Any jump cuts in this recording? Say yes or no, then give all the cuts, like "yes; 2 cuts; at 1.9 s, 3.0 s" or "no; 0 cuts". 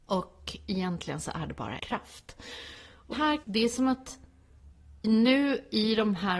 yes; 4 cuts; at 1.8 s, 3.1 s, 3.4 s, 5.0 s